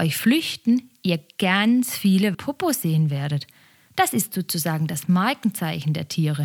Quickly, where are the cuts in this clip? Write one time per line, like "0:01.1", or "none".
0:02.3